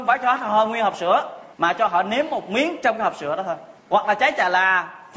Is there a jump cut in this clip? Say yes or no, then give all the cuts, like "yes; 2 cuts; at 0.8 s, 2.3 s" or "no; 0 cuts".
yes; 2 cuts; at 1.5 s, 3.8 s